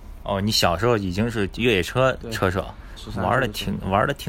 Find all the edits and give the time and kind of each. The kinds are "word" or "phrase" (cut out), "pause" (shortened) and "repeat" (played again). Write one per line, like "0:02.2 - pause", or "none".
0:03.0 - word